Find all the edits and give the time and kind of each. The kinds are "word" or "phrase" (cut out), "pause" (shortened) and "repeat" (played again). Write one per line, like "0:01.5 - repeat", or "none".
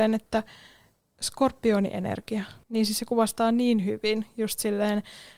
0:02.6 - pause